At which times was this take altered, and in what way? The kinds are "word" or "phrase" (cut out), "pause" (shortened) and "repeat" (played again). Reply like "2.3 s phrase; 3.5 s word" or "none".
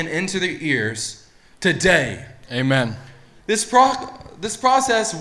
none

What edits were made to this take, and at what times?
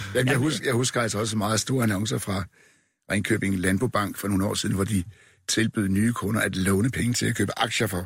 none

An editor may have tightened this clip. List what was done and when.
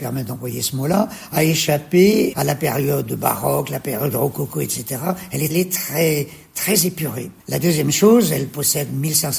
2.3 s word; 5.5 s phrase; 7.4 s pause

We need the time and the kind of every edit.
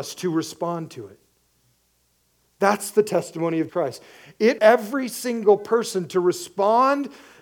3.7 s word; 4.6 s word

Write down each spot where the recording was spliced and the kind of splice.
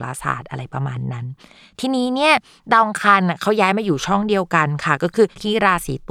none

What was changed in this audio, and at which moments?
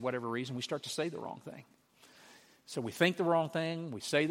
none

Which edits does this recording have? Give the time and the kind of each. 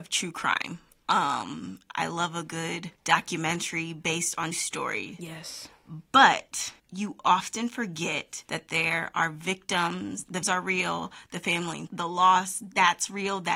2.9 s pause; 4.5 s word; 6.8 s pause; 8.4 s pause; 10.4 s word; 11.9 s word

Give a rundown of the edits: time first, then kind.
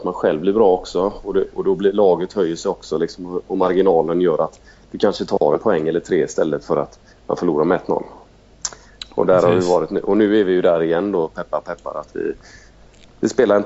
none

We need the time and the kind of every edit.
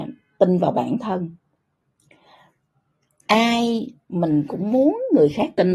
none

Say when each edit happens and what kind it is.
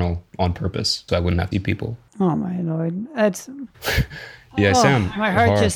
1.1 s word; 1.5 s word; 2.1 s pause; 3.7 s pause

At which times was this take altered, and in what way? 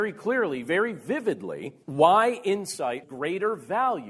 1.8 s pause; 3.0 s word

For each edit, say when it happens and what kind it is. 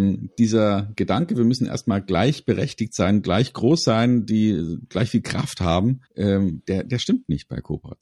6.1 s pause

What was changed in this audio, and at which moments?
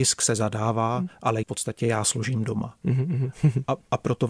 1.4 s word

